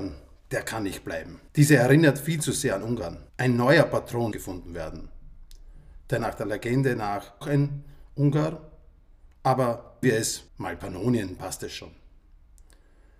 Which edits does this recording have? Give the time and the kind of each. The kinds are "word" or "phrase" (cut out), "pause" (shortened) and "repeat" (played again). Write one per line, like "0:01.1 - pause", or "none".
0:01.5 - pause
0:03.3 - pause
0:04.3 - word
0:06.2 - phrase
0:07.4 - word
0:10.0 - word
0:10.5 - pause
0:11.4 - word